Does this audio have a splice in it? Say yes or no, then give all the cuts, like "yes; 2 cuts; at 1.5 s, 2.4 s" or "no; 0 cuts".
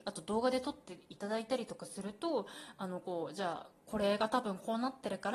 yes; 1 cut; at 3.8 s